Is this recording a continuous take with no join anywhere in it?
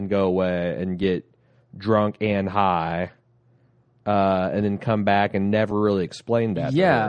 yes; 0 cuts

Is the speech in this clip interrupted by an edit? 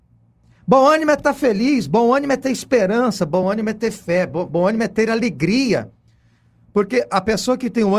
no; 0 cuts

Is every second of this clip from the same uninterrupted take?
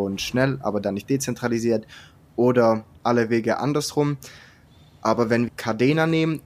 no; 1 cut; at 5.5 s

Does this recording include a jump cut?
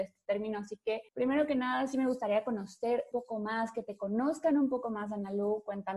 yes; 2 cuts; at 1.1 s, 3.1 s

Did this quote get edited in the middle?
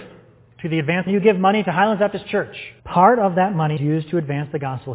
yes; 3 cuts; at 1.1 s, 2.8 s, 3.8 s

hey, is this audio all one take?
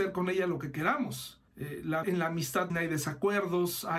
no; 3 cuts; at 1.5 s, 2.0 s, 2.7 s

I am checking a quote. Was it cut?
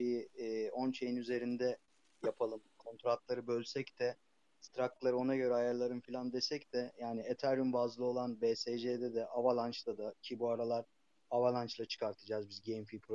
no; 0 cuts

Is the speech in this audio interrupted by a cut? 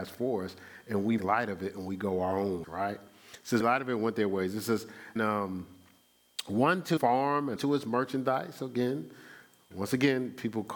yes; 6 cuts; at 1.2 s, 2.6 s, 3.6 s, 5.2 s, 7.0 s, 7.6 s

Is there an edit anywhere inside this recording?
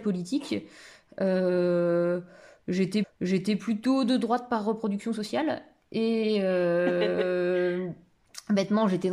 yes; 1 cut; at 3.0 s

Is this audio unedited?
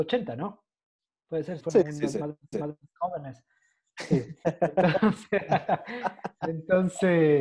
no; 2 cuts; at 1.6 s, 2.5 s

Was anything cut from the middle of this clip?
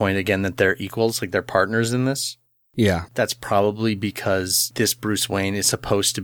yes; 1 cut; at 3.1 s

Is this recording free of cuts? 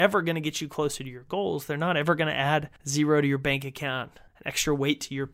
no; 2 cuts; at 2.8 s, 4.3 s

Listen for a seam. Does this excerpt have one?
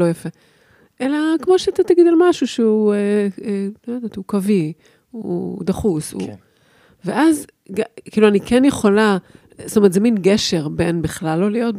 no; 0 cuts

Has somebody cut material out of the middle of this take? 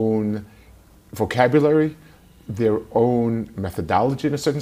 no; 0 cuts

